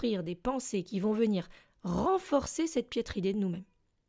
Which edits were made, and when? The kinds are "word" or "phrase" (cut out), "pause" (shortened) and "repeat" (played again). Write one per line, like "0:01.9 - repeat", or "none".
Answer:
none